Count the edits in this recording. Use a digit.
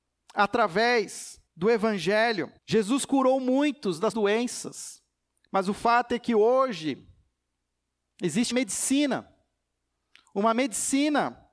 4